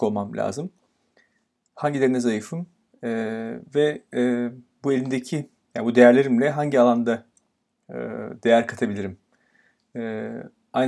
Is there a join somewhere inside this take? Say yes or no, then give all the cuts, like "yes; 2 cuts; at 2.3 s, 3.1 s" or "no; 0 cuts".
no; 0 cuts